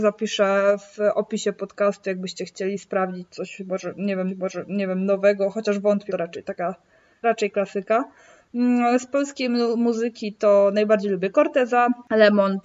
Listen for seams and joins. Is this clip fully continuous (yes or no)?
no